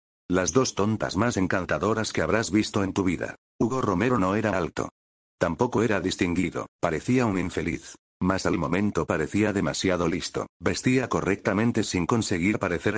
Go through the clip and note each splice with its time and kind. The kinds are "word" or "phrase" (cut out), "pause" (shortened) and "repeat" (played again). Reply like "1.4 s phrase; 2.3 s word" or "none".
4.5 s word; 6.7 s pause; 10.5 s pause